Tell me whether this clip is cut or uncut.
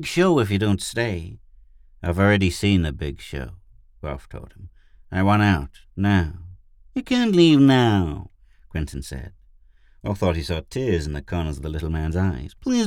uncut